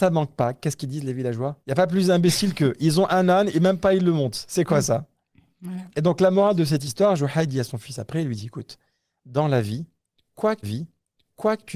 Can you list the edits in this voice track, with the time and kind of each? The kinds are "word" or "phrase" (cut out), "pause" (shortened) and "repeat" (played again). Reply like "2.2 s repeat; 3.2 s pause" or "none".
1.6 s pause; 10.6 s repeat